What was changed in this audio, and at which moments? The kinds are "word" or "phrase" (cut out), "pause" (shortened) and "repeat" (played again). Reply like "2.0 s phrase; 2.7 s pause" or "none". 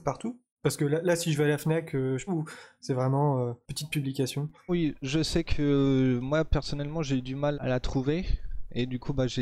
2.3 s phrase; 3.6 s pause; 4.7 s word; 7.5 s word

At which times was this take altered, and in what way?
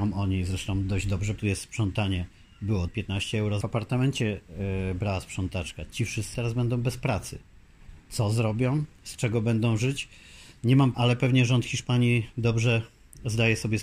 1.4 s word; 2.9 s phrase; 3.6 s phrase; 6.3 s word; 8.9 s pause; 10.9 s word

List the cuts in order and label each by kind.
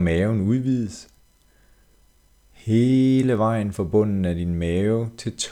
none

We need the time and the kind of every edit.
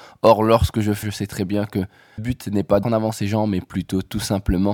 1.0 s word; 2.2 s word; 2.8 s word

